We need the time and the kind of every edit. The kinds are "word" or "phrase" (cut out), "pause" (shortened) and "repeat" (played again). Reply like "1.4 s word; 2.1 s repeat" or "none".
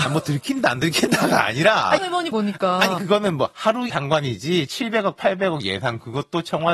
2.0 s word; 2.3 s word; 3.0 s word; 3.9 s word